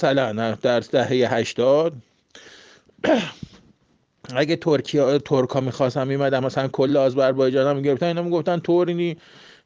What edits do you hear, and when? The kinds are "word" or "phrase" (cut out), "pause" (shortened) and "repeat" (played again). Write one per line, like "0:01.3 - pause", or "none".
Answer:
none